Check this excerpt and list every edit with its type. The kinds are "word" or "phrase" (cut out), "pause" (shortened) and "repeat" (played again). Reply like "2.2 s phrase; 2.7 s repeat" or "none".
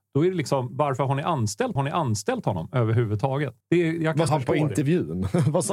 1.8 s repeat; 3.6 s pause; 4.3 s word

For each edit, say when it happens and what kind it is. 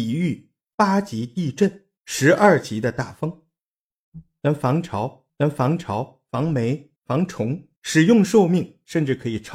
2.0 s pause; 5.3 s repeat; 7.0 s pause; 7.8 s pause

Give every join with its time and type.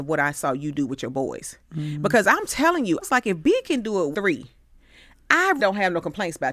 3.0 s word; 4.1 s word; 5.6 s word

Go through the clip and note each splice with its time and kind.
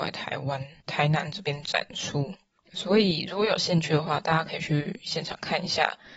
none

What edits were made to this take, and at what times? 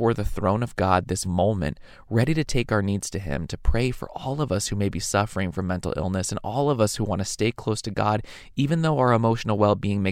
1.2 s word

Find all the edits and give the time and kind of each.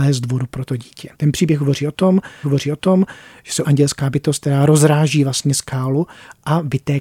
1.1 s pause; 2.4 s repeat; 3.6 s word

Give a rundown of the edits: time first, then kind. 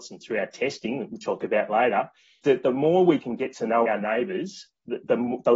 1.4 s word; 2.4 s word; 3.2 s word; 3.8 s word

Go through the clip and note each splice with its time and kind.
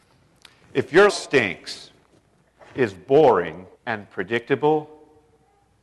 1.1 s word; 3.7 s pause

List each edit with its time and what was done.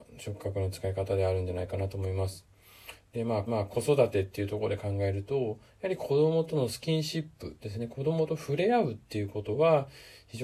3.5 s repeat

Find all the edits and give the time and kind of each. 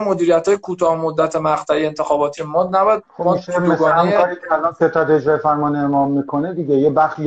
2.4 s word

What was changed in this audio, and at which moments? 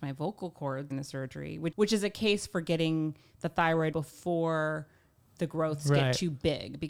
0.9 s word; 1.7 s word; 3.9 s word

